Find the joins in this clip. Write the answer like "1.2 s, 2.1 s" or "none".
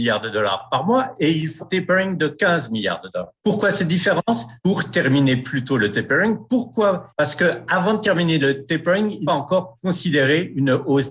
1.6 s, 4.6 s, 9.3 s